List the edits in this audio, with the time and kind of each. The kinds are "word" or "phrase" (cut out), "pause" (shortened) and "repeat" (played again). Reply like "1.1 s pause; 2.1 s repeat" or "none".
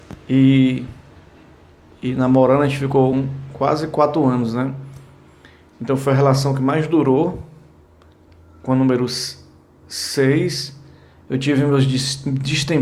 none